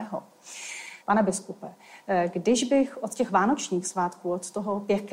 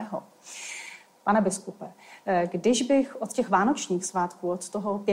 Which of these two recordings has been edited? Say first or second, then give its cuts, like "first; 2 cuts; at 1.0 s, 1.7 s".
first; 1 cut; at 1.0 s